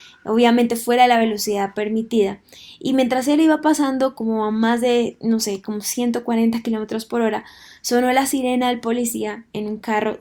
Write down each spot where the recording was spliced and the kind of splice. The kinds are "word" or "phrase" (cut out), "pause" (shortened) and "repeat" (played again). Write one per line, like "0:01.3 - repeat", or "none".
none